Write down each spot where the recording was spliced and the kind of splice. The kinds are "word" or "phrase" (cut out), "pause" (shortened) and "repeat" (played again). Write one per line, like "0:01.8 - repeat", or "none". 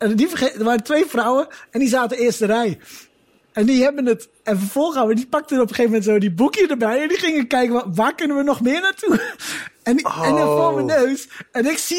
none